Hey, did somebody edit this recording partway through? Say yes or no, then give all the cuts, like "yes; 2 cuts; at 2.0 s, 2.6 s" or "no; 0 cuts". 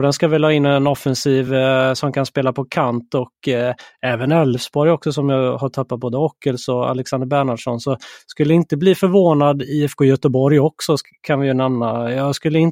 no; 0 cuts